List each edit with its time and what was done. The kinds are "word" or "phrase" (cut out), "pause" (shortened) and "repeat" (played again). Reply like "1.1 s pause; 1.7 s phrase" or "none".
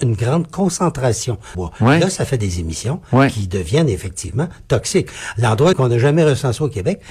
1.5 s phrase; 5.7 s phrase

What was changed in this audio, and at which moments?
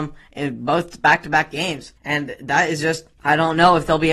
2.0 s pause; 3.2 s pause

